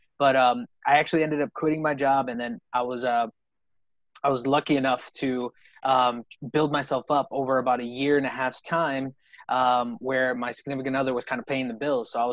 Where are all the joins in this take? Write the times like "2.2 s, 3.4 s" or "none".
none